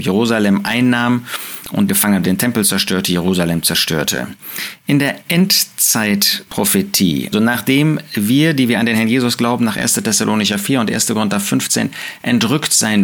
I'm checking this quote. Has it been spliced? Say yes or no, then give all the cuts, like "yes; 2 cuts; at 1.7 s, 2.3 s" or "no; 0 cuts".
yes; 4 cuts; at 1.9 s, 2.2 s, 7.3 s, 9.4 s